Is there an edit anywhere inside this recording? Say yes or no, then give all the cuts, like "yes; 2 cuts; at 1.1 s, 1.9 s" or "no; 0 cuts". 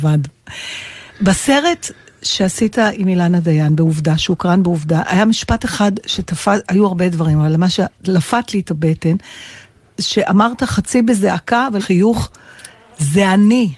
yes; 3 cuts; at 1.1 s, 8.0 s, 11.8 s